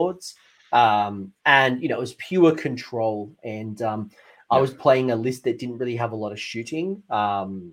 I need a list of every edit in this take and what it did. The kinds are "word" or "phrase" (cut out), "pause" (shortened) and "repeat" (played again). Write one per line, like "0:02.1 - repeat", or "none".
0:01.4 - pause